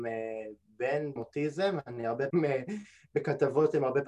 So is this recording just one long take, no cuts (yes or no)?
no